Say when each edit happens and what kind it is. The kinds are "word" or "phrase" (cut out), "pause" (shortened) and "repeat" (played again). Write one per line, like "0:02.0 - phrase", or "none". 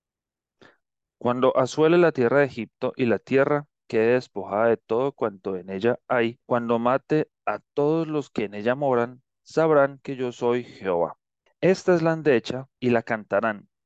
0:06.4 - pause
0:11.5 - pause
0:12.8 - pause